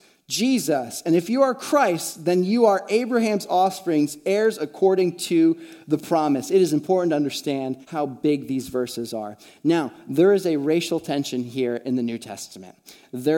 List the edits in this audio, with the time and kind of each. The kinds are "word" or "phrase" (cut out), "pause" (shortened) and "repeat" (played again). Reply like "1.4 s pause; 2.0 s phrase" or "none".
7.8 s pause

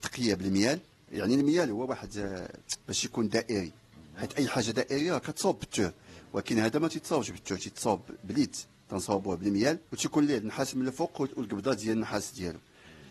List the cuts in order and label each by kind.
0.9 s pause; 2.8 s pause; 9.9 s pause

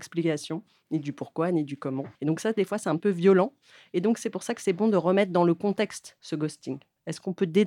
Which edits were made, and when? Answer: 2.2 s pause; 3.0 s word

